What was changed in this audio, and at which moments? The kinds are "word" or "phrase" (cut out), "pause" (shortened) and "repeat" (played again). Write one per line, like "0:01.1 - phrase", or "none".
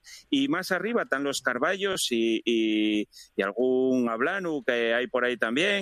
none